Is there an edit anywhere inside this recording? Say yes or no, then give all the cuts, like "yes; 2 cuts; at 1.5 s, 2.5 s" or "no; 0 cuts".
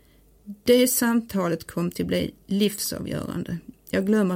no; 0 cuts